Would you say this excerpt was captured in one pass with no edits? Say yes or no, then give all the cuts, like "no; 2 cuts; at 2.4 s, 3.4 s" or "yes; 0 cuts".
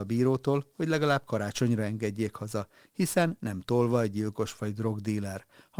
yes; 0 cuts